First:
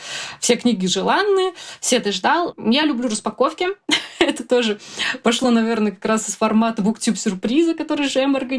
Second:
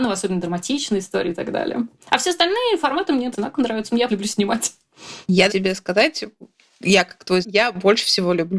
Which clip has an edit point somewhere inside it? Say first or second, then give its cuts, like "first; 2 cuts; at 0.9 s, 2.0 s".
second; 4 cuts; at 3.3 s, 4.1 s, 5.5 s, 7.4 s